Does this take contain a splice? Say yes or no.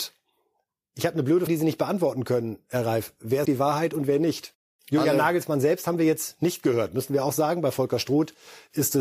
yes